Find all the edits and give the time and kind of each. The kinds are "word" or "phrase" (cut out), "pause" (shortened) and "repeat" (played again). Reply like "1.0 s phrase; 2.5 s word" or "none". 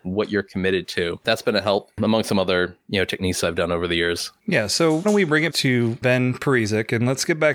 5.0 s word; 5.5 s word